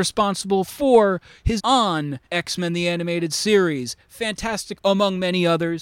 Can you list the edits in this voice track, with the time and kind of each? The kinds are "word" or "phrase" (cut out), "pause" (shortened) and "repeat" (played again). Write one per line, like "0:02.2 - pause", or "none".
0:01.6 - word
0:02.2 - pause
0:04.8 - word